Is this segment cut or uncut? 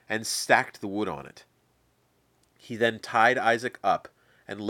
uncut